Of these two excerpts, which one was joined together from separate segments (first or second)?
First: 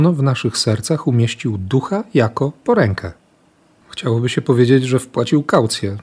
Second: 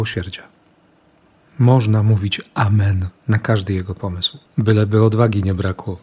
second